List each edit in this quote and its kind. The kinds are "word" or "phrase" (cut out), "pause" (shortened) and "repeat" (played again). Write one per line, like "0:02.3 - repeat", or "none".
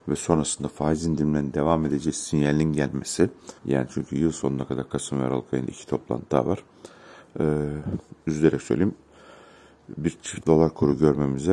0:03.6 - pause
0:10.4 - word